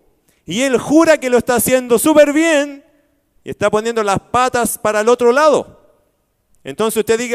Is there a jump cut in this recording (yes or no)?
no